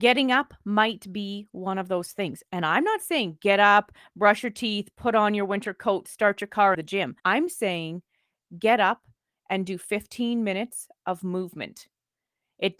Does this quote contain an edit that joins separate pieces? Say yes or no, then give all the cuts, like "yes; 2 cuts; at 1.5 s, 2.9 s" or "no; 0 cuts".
yes; 2 cuts; at 6.7 s, 7.2 s